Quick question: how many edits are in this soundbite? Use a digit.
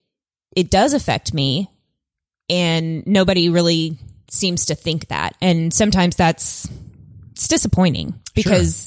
0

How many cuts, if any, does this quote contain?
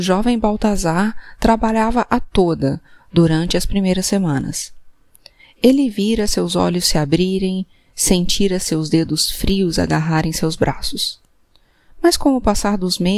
0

